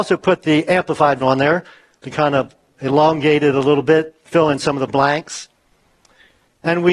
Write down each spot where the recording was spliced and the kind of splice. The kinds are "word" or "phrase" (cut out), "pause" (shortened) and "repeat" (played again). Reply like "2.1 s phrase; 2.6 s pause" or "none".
1.2 s word